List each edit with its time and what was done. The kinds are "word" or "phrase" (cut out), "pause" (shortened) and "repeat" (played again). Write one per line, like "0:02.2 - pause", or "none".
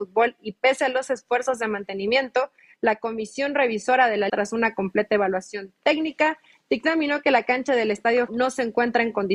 0:04.3 - word
0:08.3 - word